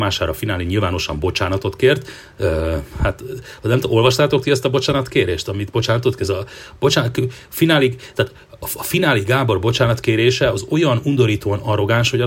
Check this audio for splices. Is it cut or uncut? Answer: uncut